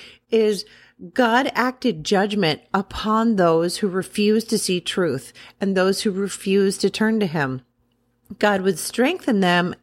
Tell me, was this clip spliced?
no; 0 cuts

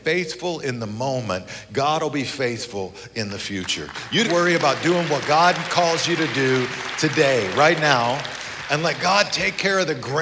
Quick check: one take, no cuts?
no; 1 cut; at 4.2 s

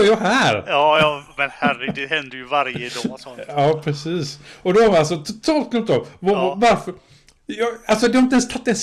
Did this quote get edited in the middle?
no; 0 cuts

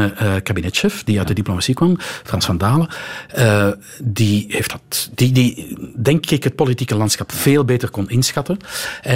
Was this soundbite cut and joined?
no; 0 cuts

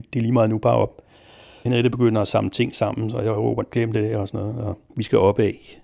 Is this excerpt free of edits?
yes; 0 cuts

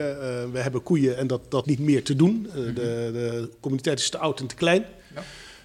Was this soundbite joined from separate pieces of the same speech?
yes; 1 cut; at 1.6 s

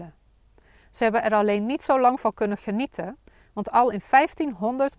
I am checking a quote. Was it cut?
no; 0 cuts

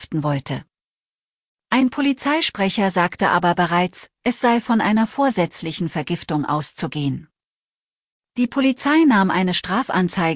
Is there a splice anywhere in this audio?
no; 0 cuts

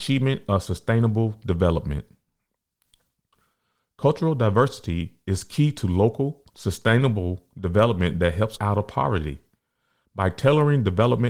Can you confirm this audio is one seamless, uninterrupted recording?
no; 2 cuts; at 6.5 s, 8.6 s

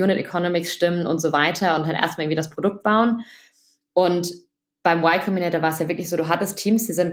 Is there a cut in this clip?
no; 0 cuts

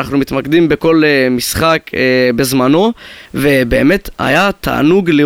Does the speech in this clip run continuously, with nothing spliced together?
no; 1 cut; at 3.3 s

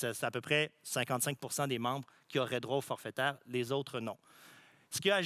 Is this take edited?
no; 0 cuts

